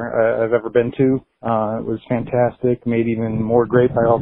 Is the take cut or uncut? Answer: cut